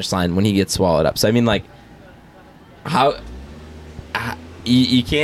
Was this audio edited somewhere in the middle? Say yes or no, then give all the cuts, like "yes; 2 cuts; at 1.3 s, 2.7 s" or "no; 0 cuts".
no; 0 cuts